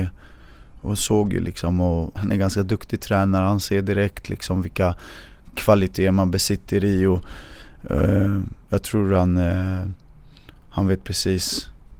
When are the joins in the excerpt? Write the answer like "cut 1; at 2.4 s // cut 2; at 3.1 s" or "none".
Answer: cut 1; at 2.2 s // cut 2; at 8.6 s